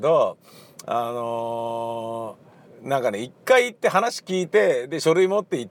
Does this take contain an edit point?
yes; 1 cut; at 2.7 s

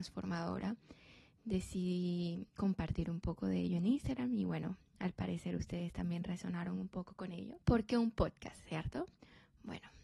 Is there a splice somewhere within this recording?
yes; 2 cuts; at 2.5 s, 7.6 s

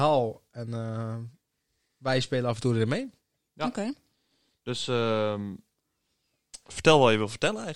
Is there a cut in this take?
no; 0 cuts

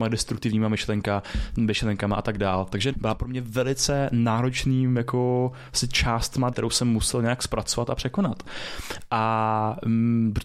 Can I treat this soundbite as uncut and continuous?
no; 2 cuts; at 2.9 s, 6.5 s

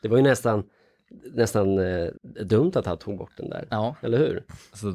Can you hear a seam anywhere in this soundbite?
yes; 1 cut; at 2.2 s

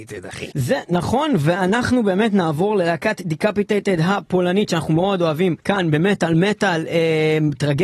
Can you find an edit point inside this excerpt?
yes; 1 cut; at 5.6 s

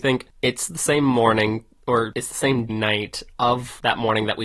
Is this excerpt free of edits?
no; 1 cut; at 2.7 s

